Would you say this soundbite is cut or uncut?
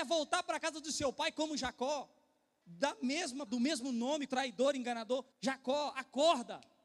cut